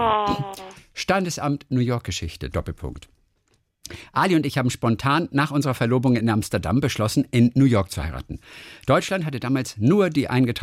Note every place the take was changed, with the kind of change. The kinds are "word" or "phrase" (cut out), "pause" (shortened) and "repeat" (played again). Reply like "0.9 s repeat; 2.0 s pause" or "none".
none